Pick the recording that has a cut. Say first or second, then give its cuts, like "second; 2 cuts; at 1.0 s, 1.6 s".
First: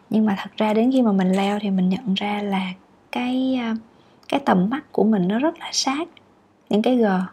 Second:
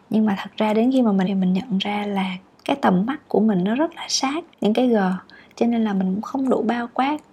second; 3 cuts; at 1.2 s, 2.5 s, 4.5 s